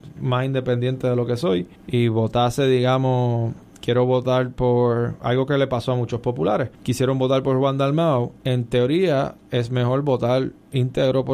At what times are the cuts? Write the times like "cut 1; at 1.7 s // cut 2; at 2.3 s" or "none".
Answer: cut 1; at 1.8 s // cut 2; at 6.7 s // cut 3; at 8.4 s